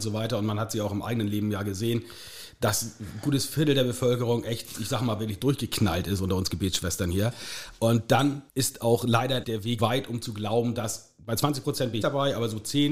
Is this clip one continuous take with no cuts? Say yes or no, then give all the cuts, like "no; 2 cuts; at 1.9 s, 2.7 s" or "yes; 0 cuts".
no; 4 cuts; at 8.5 s, 9.4 s, 9.8 s, 12.0 s